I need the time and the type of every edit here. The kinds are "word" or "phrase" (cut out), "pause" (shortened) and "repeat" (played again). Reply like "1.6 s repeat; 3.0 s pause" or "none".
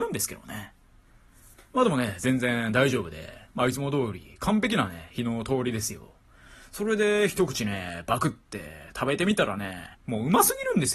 3.5 s pause; 9.9 s pause